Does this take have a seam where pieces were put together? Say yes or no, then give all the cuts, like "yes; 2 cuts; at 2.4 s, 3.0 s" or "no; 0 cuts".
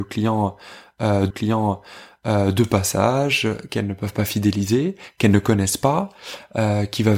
yes; 1 cut; at 1.3 s